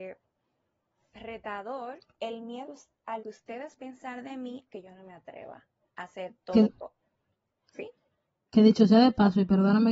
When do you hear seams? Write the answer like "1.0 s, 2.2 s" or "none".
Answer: 2.1 s, 2.6 s, 3.2 s, 3.8 s, 4.7 s, 6.6 s